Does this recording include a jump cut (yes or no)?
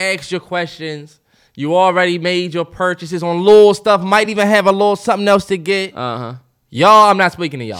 no